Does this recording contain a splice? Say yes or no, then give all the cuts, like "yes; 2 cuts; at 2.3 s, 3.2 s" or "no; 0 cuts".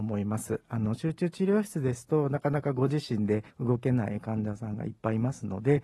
yes; 1 cut; at 3.5 s